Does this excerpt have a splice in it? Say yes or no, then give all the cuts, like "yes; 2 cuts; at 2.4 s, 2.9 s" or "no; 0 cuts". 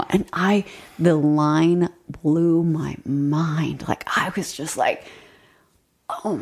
no; 0 cuts